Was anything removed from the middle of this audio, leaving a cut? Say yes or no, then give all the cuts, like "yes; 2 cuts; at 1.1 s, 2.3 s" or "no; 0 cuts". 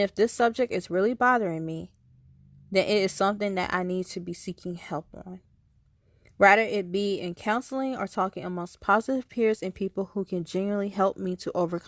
no; 0 cuts